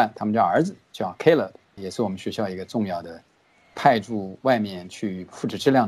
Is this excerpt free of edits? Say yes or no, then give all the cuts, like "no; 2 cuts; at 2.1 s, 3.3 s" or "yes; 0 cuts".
yes; 0 cuts